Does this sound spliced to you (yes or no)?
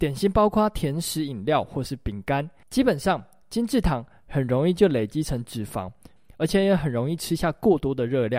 no